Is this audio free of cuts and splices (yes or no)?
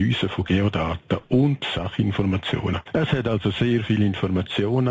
yes